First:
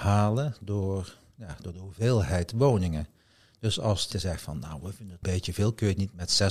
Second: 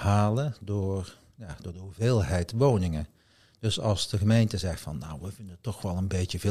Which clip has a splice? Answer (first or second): first